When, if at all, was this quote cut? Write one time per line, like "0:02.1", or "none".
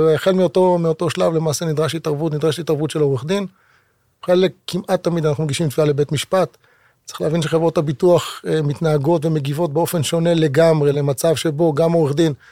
none